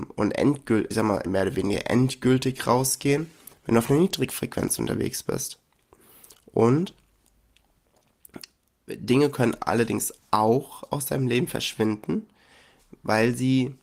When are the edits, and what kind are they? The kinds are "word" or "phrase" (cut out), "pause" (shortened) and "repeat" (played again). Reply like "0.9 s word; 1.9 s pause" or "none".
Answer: 0.9 s word; 1.3 s word